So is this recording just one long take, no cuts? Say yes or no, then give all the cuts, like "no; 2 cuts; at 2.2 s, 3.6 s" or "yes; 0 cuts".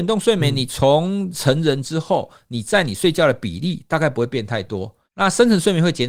no; 1 cut; at 5.1 s